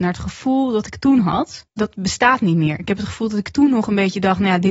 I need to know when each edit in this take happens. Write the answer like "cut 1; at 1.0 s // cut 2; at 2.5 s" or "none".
cut 1; at 1.7 s